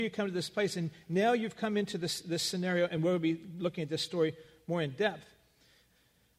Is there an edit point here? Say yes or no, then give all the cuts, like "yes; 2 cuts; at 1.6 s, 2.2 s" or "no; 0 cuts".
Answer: no; 0 cuts